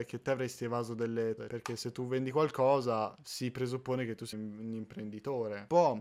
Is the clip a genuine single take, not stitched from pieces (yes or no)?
no